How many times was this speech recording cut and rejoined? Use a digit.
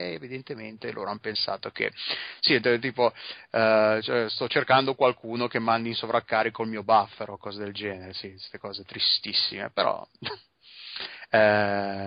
0